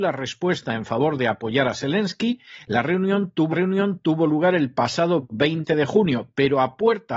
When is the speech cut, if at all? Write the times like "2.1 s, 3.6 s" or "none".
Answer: 3.5 s